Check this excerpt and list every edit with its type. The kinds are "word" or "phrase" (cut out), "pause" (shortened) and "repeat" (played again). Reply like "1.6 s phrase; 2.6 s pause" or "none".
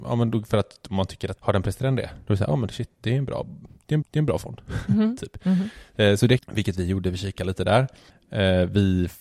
1.4 s word; 1.8 s word; 2.2 s pause; 4.0 s repeat; 6.4 s phrase